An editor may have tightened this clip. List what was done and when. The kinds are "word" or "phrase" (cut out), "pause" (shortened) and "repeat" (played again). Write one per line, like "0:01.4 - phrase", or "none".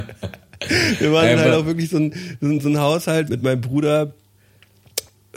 0:03.3 - phrase

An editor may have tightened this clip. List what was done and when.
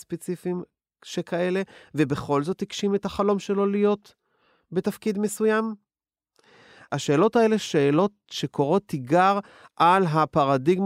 none

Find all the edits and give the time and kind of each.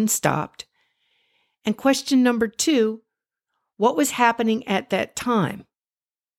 none

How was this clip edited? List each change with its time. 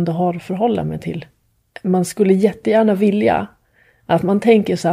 none

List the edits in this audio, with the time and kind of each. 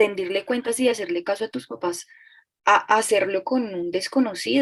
none

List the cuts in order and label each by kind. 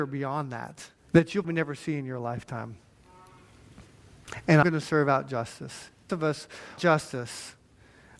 0:01.0 - pause
0:01.4 - word
0:04.6 - word
0:06.1 - phrase
0:06.8 - word

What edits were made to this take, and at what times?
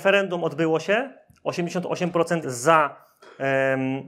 0:02.4 - word

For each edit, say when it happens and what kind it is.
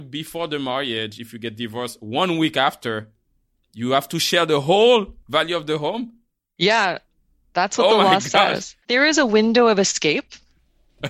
0:05.2 - pause
0:08.8 - pause

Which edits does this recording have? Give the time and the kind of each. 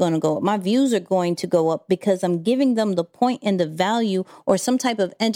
none

